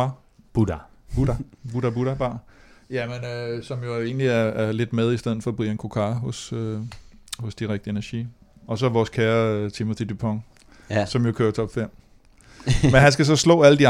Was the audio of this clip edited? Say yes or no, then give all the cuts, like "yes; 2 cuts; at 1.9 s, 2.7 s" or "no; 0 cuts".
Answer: no; 0 cuts